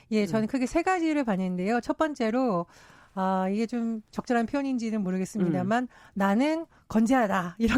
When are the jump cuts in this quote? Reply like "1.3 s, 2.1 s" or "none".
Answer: none